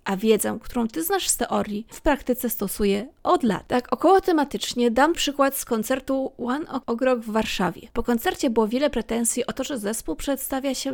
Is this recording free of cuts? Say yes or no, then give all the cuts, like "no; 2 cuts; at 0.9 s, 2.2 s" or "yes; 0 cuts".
no; 2 cuts; at 1.9 s, 5.1 s